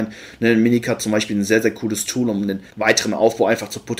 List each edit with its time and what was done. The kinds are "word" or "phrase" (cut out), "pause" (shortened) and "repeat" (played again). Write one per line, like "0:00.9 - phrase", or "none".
0:02.7 - pause

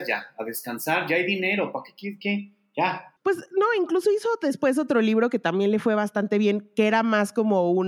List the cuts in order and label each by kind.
0:03.2 - pause

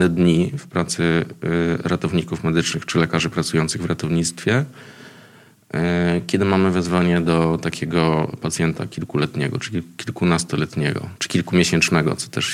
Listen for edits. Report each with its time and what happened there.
none

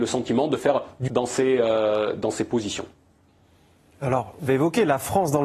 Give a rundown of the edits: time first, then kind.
0:01.1 - word
0:04.5 - word

